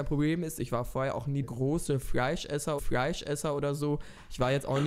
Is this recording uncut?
no; 2 cuts; at 1.4 s, 2.8 s

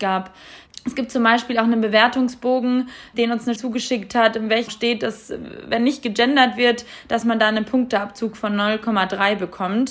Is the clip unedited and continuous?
no; 2 cuts; at 3.6 s, 4.7 s

